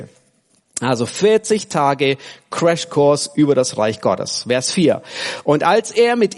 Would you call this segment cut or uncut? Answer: uncut